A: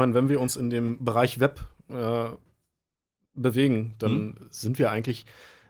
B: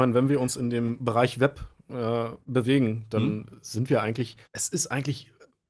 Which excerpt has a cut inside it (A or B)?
B